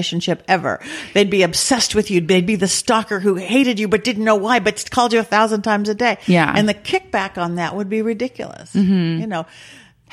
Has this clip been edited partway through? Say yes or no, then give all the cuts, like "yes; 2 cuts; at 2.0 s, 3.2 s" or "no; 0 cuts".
no; 0 cuts